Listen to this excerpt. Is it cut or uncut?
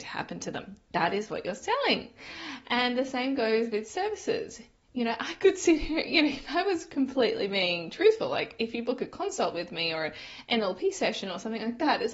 uncut